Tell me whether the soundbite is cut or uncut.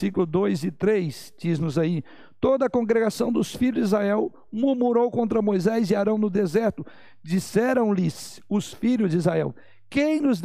uncut